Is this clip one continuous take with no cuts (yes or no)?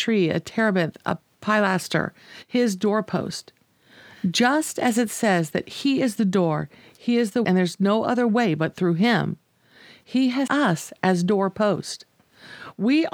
no